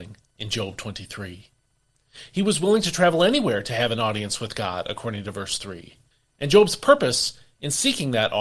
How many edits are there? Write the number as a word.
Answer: one